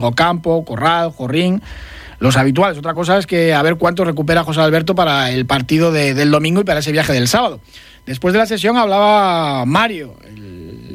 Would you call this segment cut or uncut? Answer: uncut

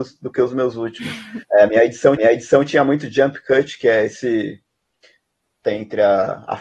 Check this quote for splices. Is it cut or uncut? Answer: cut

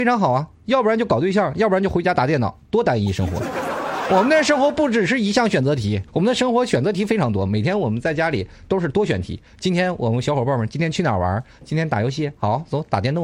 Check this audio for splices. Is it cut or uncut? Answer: cut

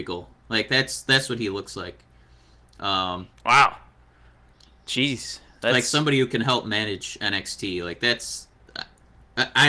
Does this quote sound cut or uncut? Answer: uncut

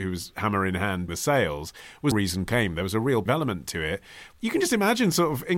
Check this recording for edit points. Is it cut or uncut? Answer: cut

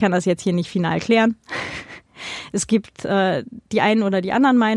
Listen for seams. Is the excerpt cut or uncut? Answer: uncut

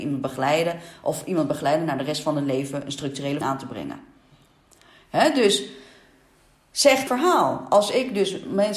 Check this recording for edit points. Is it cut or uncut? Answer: cut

